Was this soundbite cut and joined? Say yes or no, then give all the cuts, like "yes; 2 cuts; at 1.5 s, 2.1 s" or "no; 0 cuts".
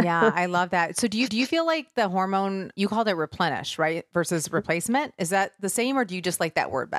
yes; 2 cuts; at 1.3 s, 2.7 s